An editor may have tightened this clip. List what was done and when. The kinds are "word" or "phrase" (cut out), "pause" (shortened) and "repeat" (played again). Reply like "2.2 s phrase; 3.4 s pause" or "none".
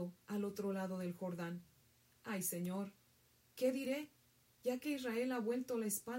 none